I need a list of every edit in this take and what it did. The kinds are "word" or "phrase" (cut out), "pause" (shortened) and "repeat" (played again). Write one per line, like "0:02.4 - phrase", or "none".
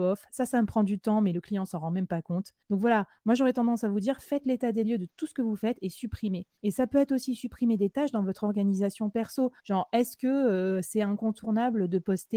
0:02.6 - pause
0:06.6 - pause
0:09.6 - pause